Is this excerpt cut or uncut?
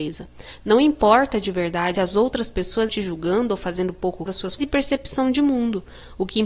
cut